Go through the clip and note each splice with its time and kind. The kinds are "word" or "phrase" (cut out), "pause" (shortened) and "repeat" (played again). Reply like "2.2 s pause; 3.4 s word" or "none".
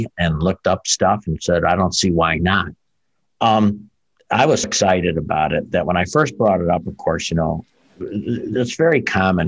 4.6 s word